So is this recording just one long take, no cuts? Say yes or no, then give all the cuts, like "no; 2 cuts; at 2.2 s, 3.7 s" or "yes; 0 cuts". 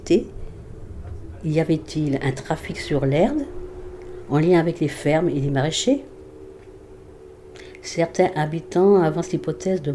yes; 0 cuts